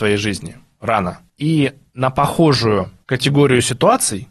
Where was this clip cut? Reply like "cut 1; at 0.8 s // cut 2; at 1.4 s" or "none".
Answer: none